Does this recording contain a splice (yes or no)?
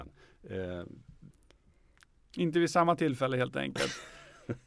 no